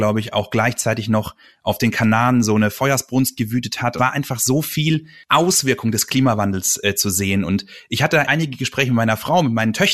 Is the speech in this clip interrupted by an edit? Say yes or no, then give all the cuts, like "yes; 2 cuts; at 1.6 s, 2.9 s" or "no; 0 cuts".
yes; 2 cuts; at 4.0 s, 8.3 s